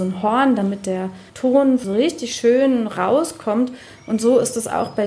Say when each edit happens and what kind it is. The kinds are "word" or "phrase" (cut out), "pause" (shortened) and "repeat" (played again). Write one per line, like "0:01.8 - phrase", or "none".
0:01.3 - pause

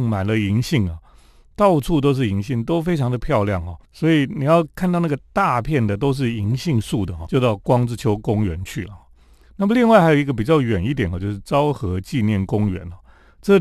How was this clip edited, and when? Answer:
0:03.8 - pause
0:07.3 - word

